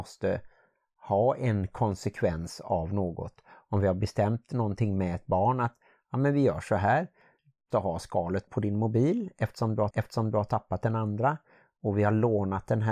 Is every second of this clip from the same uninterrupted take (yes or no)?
no